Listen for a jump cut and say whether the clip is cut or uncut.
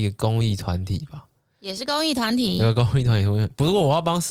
uncut